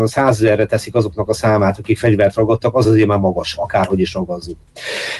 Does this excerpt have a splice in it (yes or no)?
no